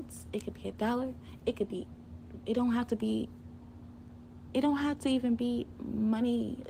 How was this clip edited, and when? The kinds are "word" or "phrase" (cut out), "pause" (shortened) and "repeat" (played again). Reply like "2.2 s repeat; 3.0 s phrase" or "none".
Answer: none